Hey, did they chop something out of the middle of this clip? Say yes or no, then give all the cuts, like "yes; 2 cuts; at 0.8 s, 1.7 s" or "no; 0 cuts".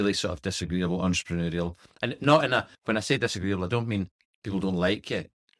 yes; 1 cut; at 2.7 s